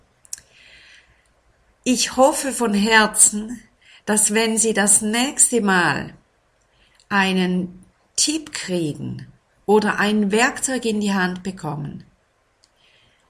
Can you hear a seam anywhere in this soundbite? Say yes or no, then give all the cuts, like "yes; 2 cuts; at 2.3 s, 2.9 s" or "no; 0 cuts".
no; 0 cuts